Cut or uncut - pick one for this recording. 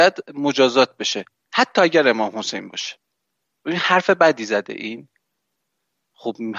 uncut